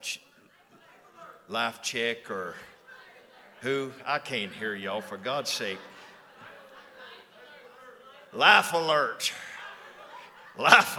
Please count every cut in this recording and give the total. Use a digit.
0